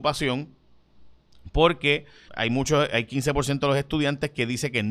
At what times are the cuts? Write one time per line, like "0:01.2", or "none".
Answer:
0:02.3